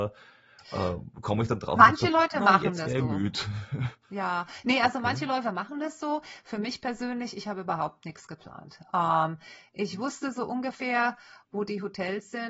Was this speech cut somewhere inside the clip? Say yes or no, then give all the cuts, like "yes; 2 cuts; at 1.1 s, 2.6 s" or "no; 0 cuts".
yes; 1 cut; at 4.0 s